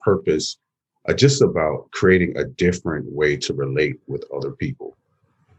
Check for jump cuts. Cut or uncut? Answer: uncut